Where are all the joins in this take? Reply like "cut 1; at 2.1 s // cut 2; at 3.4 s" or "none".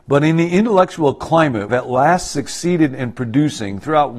cut 1; at 1.7 s